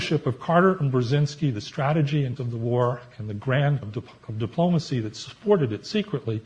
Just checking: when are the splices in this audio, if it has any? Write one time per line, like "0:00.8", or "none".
0:02.4
0:03.8